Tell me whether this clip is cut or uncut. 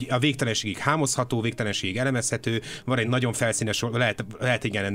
uncut